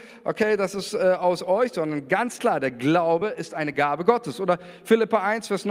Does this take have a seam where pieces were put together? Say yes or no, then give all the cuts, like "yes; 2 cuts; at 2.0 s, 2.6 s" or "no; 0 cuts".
no; 0 cuts